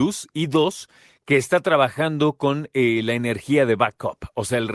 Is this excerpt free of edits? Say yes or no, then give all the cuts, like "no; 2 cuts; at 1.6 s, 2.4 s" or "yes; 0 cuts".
yes; 0 cuts